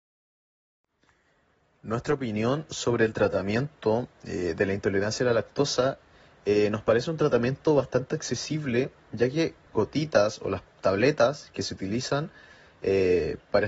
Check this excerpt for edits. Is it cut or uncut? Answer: cut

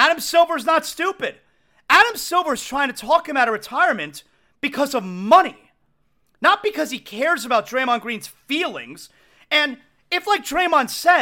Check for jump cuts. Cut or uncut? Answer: uncut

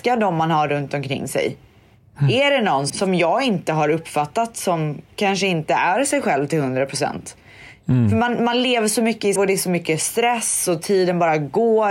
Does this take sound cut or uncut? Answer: cut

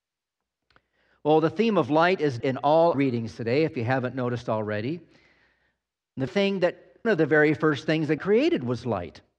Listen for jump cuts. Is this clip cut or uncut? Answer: cut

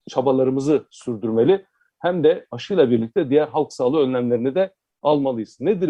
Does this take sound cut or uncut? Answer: uncut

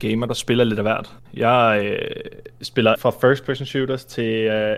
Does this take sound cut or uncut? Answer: cut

